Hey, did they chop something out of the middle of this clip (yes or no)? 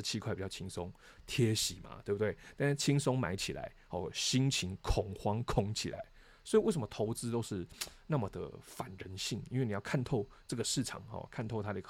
no